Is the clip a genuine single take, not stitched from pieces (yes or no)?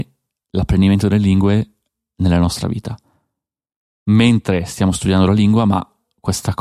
yes